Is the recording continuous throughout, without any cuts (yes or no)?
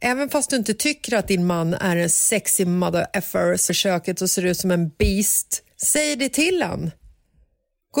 no